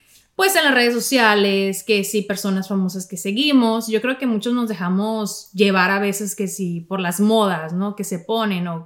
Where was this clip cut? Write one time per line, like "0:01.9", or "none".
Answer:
none